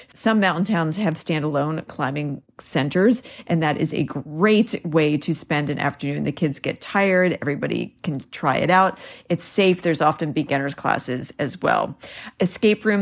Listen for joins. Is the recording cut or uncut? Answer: uncut